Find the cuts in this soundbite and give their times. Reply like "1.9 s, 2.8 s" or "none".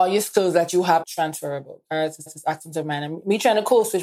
1.0 s, 2.3 s